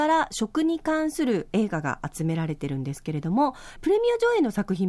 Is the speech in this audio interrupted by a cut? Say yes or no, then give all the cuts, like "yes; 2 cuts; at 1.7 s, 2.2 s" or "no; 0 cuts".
yes; 1 cut; at 3.8 s